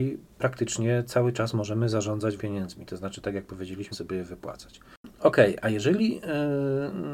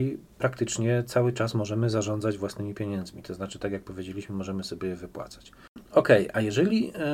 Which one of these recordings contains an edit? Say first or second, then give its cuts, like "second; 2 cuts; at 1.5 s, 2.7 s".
first; 2 cuts; at 2.4 s, 3.9 s